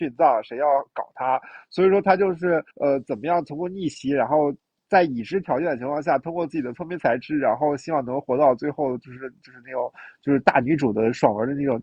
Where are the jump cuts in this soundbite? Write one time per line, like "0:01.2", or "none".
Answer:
0:02.7